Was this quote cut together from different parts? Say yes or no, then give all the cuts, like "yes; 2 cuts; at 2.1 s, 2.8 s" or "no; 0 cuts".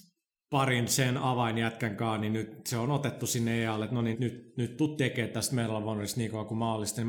yes; 1 cut; at 4.1 s